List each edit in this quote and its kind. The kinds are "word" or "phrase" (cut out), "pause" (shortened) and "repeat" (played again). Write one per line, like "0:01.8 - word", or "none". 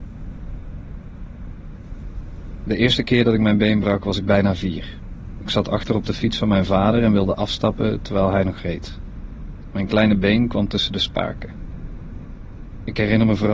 none